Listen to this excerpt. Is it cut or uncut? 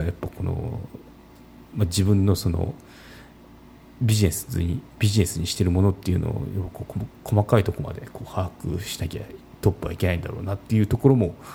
uncut